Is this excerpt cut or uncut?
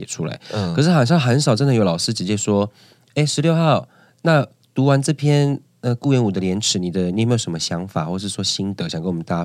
uncut